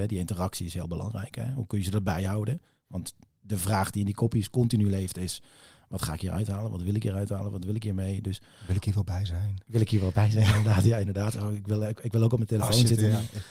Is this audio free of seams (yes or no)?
yes